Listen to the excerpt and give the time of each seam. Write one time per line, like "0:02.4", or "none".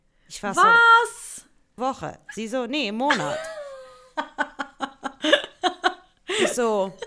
0:01.8